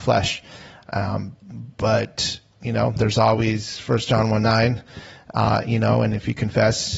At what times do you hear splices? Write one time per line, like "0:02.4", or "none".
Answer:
none